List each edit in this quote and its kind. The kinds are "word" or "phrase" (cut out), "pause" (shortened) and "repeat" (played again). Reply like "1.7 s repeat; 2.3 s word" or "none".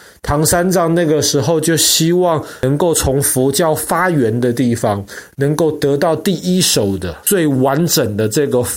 7.2 s pause